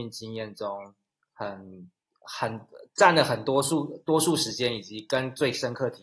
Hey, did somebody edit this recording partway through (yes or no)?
yes